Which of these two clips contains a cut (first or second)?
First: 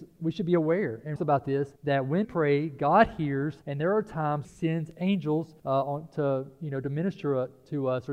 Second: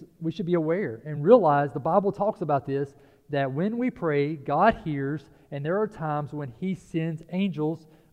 first